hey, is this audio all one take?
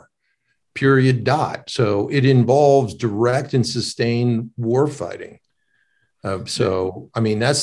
yes; 0 cuts

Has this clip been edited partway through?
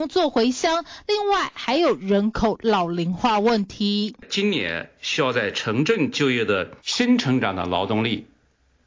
yes; 1 cut; at 6.8 s

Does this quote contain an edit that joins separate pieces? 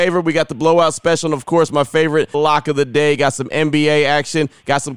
yes; 1 cut; at 2.3 s

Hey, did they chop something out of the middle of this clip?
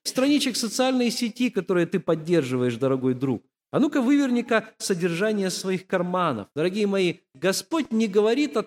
yes; 1 cut; at 6.5 s

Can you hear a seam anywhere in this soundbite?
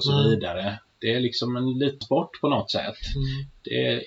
yes; 1 cut; at 2.0 s

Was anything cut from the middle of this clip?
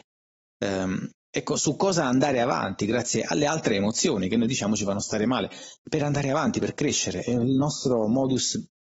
yes; 2 cuts; at 1.2 s, 5.8 s

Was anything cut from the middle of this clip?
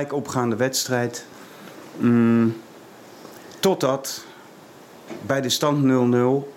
no; 0 cuts

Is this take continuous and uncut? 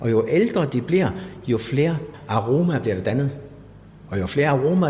yes; 0 cuts

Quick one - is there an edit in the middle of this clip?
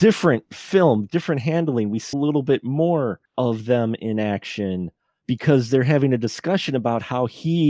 yes; 2 cuts; at 2.1 s, 5.2 s

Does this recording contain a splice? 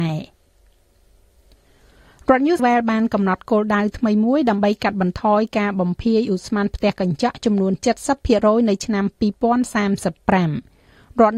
yes; 1 cut; at 2.6 s

